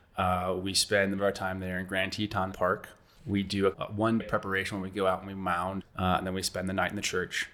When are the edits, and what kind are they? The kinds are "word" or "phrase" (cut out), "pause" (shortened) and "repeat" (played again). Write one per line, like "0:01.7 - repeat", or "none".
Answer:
0:01.2 - word
0:02.5 - word
0:03.7 - word
0:04.2 - word
0:05.8 - word